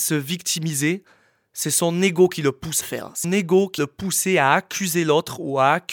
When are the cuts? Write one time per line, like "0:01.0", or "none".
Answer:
0:02.8
0:03.2
0:03.8